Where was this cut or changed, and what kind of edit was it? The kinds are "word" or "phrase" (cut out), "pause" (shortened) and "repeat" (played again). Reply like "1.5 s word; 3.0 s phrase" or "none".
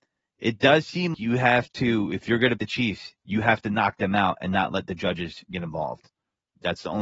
1.1 s word; 2.6 s word; 3.2 s pause

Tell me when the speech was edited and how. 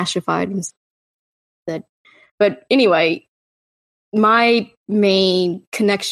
none

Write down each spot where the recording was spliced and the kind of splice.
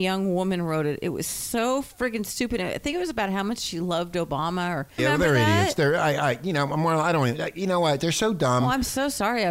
5.0 s word

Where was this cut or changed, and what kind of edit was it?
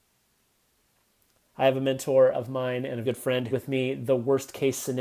2.3 s word; 3.0 s word; 3.5 s phrase

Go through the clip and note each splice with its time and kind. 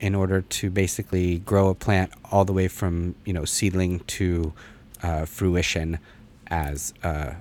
none

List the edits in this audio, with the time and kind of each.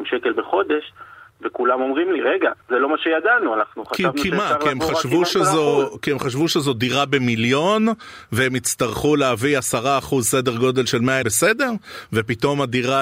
2.6 s pause; 11.2 s phrase

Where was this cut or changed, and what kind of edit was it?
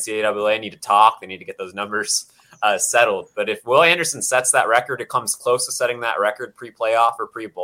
none

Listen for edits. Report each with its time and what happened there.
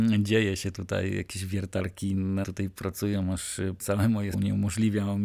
2.4 s word; 3.8 s word; 4.3 s word

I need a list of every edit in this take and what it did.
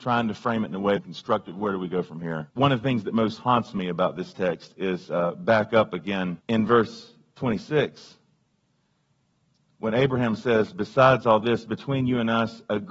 1.0 s phrase; 2.5 s pause; 6.4 s pause

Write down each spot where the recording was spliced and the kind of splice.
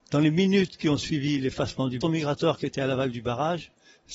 2.0 s phrase

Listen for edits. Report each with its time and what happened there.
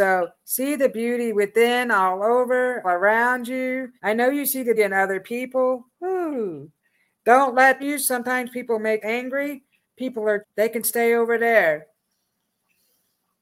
2.8 s word; 4.0 s pause; 4.8 s word; 5.9 s pause; 7.8 s phrase; 9.0 s word; 10.4 s word

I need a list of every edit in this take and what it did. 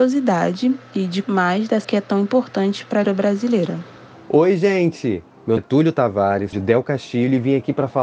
1.2 s word; 1.8 s word; 3.0 s word; 5.6 s word; 6.5 s word

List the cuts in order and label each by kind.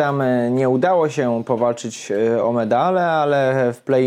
none

